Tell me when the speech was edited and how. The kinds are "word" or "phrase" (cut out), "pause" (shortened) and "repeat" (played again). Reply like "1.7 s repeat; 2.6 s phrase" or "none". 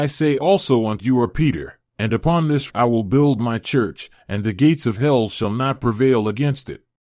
1.0 s phrase; 1.9 s pause; 2.7 s word